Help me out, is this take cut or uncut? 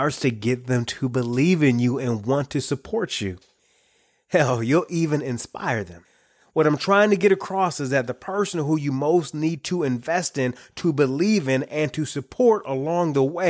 uncut